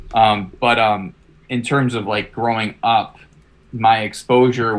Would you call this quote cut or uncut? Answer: uncut